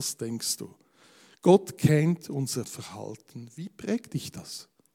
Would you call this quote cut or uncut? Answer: cut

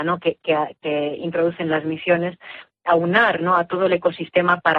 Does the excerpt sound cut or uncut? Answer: uncut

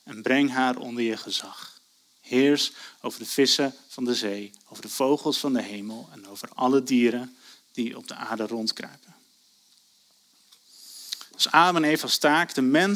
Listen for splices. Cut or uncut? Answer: uncut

